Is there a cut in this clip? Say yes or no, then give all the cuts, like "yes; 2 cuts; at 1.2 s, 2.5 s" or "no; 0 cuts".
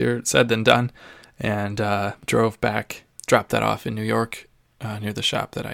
no; 0 cuts